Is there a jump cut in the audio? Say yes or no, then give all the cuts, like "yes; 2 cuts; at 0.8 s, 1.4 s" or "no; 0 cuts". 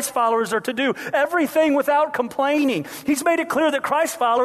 no; 0 cuts